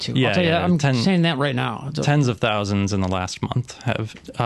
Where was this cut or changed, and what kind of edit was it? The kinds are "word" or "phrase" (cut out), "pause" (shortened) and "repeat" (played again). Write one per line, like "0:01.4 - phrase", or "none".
none